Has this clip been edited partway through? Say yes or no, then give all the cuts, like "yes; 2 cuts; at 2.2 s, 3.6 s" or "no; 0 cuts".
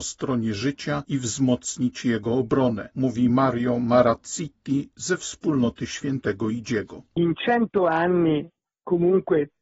no; 0 cuts